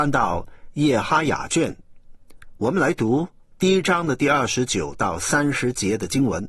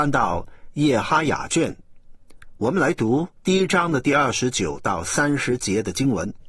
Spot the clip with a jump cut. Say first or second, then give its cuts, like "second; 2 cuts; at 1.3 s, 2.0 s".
second; 1 cut; at 3.3 s